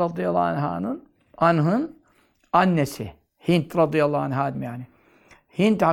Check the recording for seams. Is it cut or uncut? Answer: cut